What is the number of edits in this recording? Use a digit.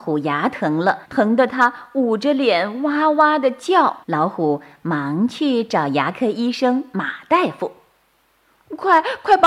2